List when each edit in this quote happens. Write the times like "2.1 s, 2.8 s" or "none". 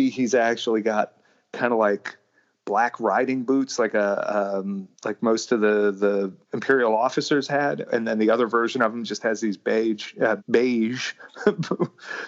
4.9 s, 6.4 s, 10.4 s

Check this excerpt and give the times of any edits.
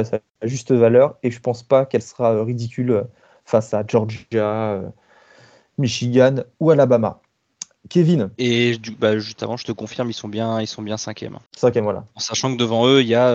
11.5 s

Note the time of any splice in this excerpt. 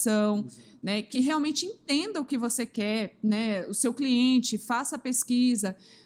none

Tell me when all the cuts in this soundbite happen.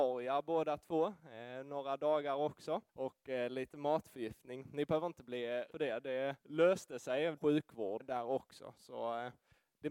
2.9 s, 5.7 s, 6.4 s, 7.4 s, 8.0 s

